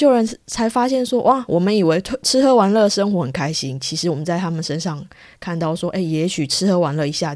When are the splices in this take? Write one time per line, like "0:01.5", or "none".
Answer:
none